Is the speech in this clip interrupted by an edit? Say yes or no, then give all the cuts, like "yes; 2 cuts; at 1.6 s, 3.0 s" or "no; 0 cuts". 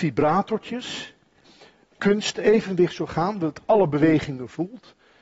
yes; 1 cut; at 1.9 s